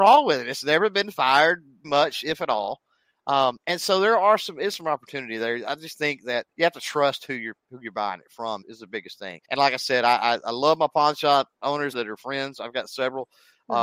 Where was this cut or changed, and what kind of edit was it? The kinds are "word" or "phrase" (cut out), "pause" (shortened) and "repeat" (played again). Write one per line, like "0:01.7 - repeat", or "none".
0:01.8 - word
0:06.5 - pause
0:08.6 - word
0:09.4 - pause
0:11.9 - phrase